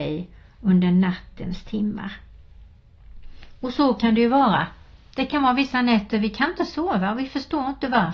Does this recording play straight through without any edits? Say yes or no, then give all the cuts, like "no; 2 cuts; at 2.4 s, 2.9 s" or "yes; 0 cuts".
yes; 0 cuts